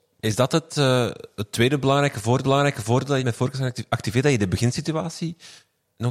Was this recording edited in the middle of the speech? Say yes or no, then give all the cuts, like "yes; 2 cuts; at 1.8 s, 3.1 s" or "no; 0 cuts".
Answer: yes; 2 cuts; at 2.4 s, 3.2 s